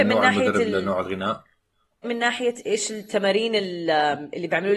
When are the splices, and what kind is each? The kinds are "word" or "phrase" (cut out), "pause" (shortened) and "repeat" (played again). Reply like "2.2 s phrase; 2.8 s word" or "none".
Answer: 2.0 s word